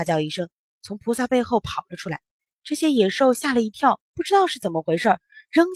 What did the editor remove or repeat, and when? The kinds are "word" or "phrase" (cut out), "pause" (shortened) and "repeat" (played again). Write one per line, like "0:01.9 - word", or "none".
0:02.3 - pause
0:04.0 - pause